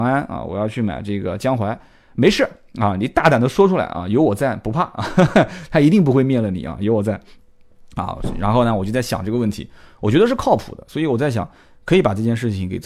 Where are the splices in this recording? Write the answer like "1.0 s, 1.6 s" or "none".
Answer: none

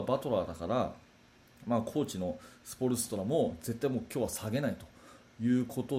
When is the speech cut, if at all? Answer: none

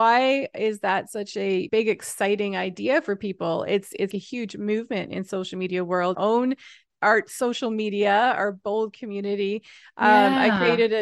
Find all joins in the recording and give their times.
1.7 s, 4.1 s, 6.1 s

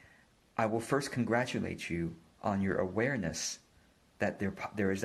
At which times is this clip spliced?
none

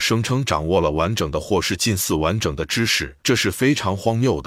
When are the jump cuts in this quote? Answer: 3.2 s

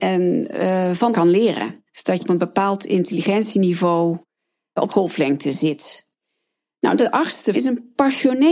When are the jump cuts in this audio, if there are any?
1.1 s, 2.2 s, 4.9 s, 7.0 s, 7.5 s

